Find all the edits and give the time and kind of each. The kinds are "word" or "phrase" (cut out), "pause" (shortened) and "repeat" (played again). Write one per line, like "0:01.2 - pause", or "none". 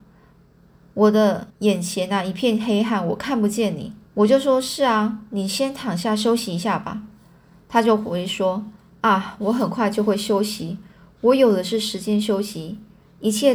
0:01.5 - pause
0:04.0 - pause